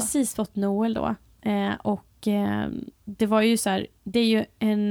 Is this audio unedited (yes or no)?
no